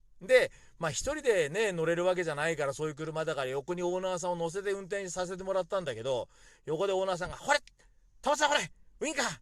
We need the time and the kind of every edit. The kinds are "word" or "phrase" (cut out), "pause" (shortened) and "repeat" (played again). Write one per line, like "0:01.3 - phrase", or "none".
none